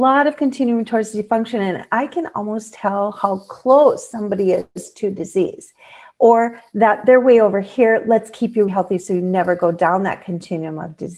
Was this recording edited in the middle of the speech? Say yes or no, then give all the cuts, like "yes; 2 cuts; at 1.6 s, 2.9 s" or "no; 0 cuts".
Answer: yes; 1 cut; at 8.7 s